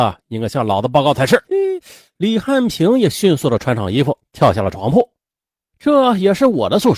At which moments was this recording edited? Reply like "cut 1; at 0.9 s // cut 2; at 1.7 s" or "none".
cut 1; at 1.4 s